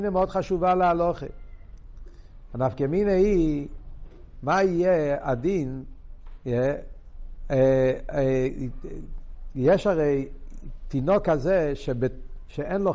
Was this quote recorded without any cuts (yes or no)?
yes